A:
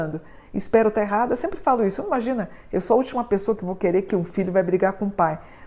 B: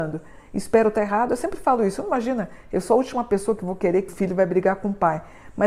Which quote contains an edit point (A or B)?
B